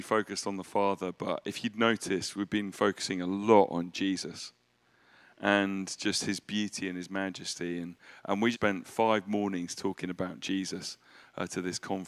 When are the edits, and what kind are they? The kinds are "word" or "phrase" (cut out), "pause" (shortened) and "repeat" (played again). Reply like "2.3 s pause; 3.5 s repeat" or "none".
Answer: 8.5 s word